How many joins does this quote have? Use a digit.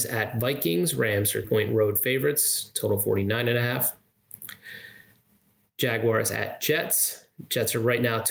1